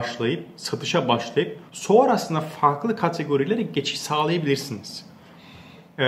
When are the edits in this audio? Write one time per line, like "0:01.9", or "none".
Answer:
0:01.7

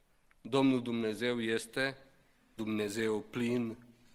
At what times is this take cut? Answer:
0:02.6

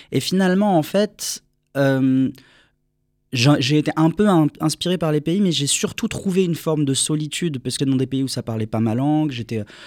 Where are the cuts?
0:07.8

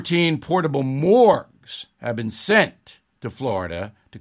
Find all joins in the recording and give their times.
0:01.9

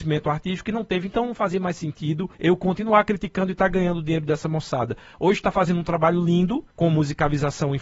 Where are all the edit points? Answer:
0:02.3
0:06.7

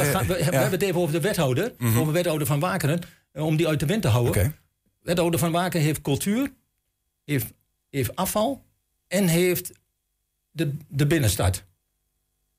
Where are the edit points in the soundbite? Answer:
none

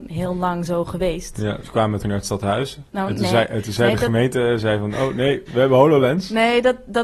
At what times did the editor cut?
0:01.6
0:02.0
0:05.5

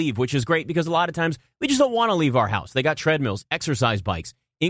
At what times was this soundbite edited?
none

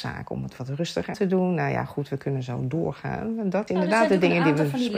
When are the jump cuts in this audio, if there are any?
0:01.1
0:03.7

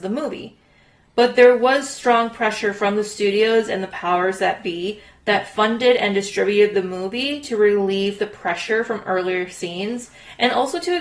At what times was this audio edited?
none

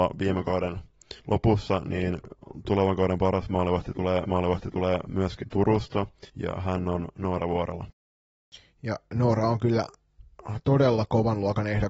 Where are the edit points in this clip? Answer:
0:01.2
0:04.2
0:06.3

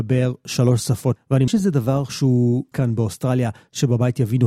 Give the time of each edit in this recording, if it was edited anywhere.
0:01.2
0:01.5
0:02.7

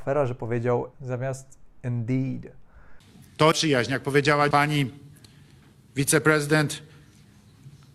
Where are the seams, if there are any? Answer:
0:00.9
0:03.5
0:04.5

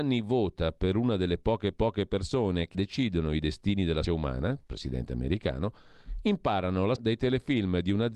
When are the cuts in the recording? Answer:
0:01.7
0:02.7
0:04.0
0:07.0

